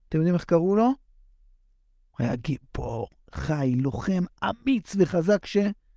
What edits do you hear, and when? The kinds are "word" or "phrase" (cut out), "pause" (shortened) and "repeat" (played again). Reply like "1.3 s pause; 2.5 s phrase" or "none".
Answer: none